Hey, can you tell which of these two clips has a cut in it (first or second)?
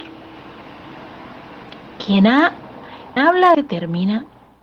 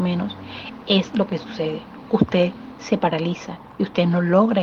first